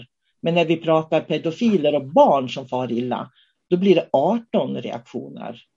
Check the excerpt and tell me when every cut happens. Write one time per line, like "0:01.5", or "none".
none